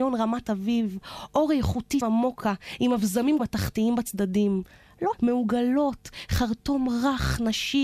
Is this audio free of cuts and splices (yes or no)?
no